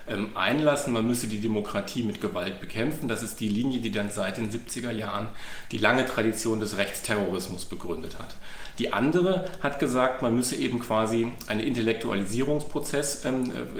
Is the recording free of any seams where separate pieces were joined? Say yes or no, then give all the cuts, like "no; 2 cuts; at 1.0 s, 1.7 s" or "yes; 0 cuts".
yes; 0 cuts